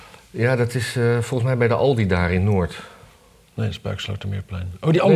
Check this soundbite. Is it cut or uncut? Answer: uncut